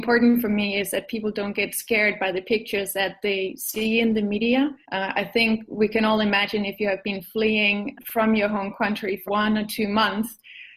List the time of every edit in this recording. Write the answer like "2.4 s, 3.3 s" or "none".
4.8 s, 8.0 s, 9.3 s